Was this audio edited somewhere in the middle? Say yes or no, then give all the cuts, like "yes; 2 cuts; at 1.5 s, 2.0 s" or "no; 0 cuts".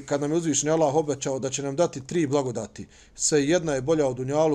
no; 0 cuts